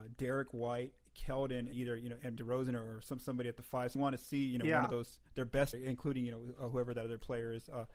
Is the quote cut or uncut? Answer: cut